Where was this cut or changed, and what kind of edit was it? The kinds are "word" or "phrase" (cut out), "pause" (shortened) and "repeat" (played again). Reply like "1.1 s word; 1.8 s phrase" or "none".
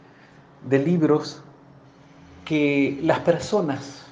none